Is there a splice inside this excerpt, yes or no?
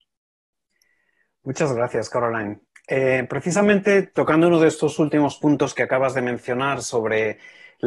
no